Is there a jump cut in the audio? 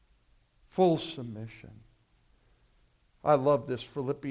no; 0 cuts

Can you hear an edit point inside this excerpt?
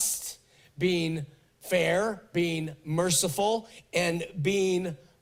no; 0 cuts

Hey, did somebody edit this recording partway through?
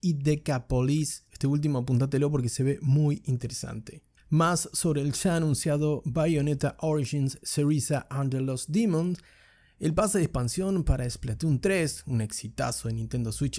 no; 0 cuts

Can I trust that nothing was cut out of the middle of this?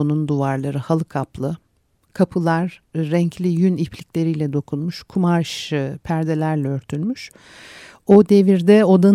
yes; 0 cuts

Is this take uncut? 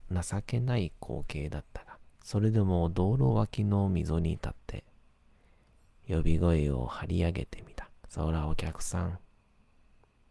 no; 2 cuts; at 2.1 s, 8.0 s

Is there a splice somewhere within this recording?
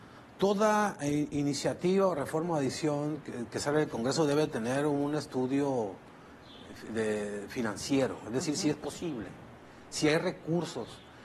no; 0 cuts

